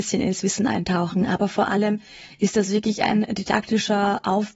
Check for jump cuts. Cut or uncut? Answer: uncut